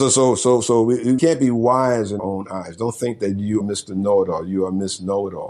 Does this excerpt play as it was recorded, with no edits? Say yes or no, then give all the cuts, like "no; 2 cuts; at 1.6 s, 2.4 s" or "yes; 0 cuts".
no; 3 cuts; at 1.2 s, 2.2 s, 3.6 s